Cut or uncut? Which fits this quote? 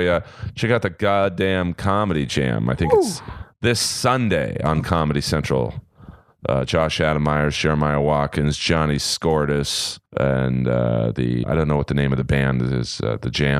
cut